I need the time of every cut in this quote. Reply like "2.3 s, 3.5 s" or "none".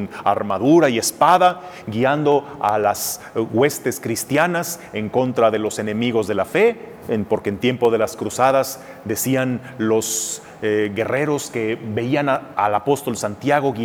none

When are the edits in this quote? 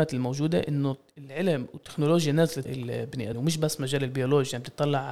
2.6 s, 3.3 s

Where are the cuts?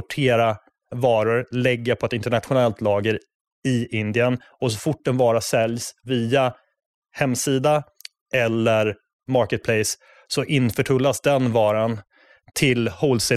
none

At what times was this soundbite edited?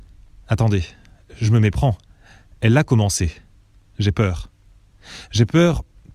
none

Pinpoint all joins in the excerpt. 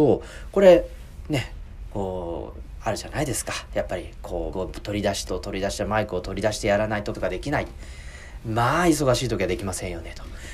4.5 s, 5.3 s, 7.1 s

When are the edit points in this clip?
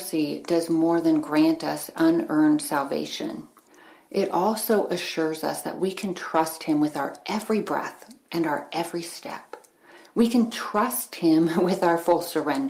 none

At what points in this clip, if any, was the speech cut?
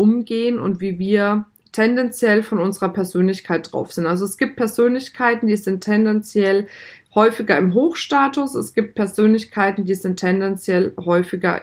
none

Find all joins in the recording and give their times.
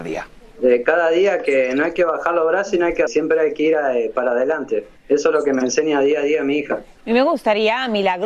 3.1 s

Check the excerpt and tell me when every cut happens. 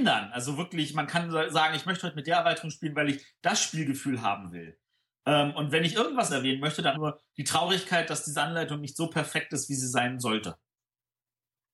6.3 s, 6.9 s

